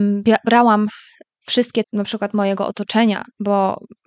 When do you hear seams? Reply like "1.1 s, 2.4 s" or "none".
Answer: 1.8 s